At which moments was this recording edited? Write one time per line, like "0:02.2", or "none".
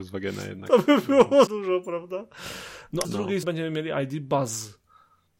0:01.5
0:03.0
0:03.4